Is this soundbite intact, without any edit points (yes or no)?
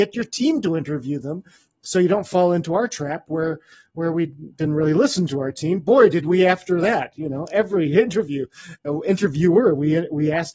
yes